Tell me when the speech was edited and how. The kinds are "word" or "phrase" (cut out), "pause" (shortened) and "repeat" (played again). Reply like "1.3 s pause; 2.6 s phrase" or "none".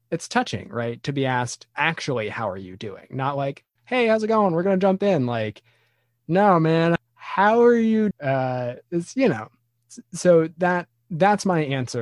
1.7 s pause; 7.0 s word; 8.1 s word